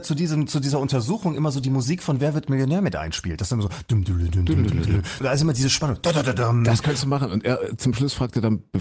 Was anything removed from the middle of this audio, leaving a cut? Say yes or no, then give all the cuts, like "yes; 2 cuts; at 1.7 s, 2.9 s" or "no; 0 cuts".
yes; 1 cut; at 5.2 s